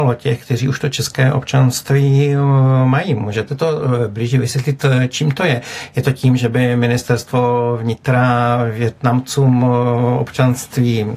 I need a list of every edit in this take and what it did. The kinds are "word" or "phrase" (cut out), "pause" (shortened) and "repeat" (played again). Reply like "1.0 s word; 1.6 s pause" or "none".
none